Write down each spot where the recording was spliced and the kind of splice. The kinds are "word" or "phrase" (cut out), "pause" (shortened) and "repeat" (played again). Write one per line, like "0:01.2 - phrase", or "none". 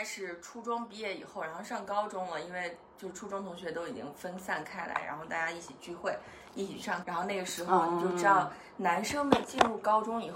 0:07.0 - word